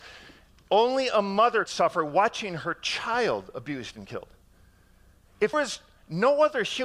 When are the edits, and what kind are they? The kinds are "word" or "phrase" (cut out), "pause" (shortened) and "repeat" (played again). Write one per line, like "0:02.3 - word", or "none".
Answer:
0:01.7 - word
0:05.5 - word